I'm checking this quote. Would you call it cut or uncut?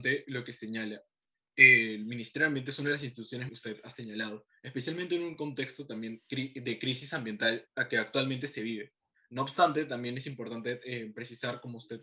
cut